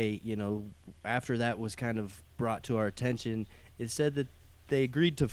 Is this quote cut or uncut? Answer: uncut